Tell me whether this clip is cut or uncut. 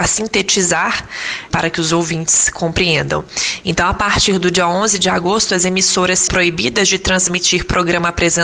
cut